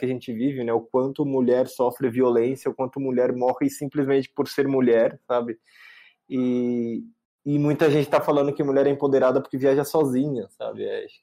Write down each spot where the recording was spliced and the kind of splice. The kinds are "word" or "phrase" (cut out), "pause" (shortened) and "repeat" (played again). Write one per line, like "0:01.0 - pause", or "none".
none